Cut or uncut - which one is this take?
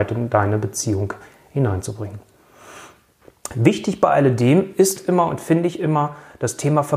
uncut